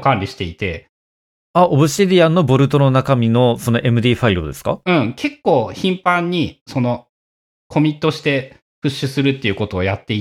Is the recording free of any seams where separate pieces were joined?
yes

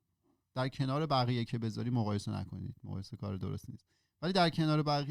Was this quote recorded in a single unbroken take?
yes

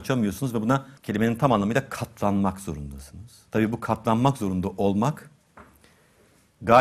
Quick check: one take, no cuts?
no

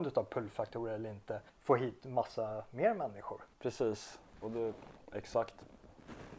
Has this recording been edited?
yes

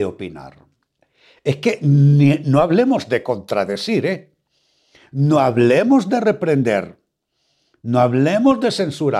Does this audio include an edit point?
no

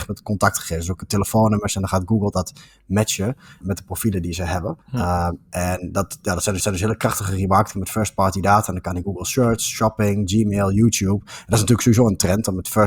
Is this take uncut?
no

